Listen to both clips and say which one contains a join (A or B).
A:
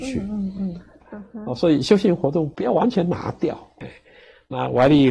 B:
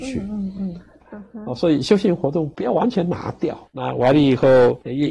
B